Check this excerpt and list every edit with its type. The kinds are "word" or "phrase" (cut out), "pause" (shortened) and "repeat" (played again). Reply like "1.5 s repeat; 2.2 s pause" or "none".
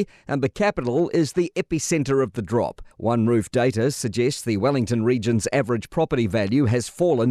2.9 s pause

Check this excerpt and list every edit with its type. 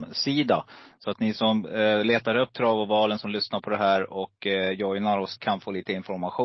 5.4 s word

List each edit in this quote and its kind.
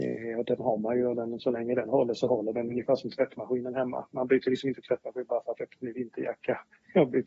5.6 s word

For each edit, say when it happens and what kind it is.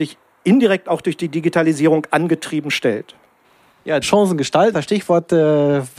4.0 s word; 4.7 s word

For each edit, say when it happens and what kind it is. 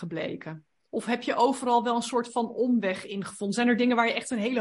none

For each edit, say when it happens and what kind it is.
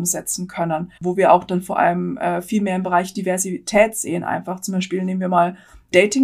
1.0 s pause

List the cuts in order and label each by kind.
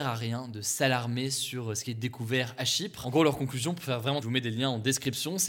1.9 s word; 4.2 s phrase

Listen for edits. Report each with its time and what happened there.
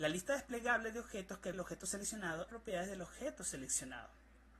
1.5 s phrase; 2.5 s phrase

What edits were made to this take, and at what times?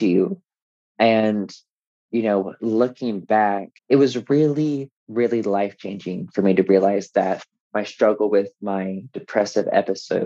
3.8 s pause; 5.0 s pause

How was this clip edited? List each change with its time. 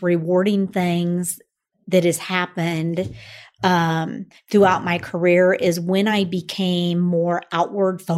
none

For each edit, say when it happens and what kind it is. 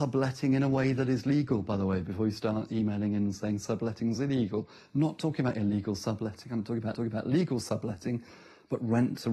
6.9 s repeat

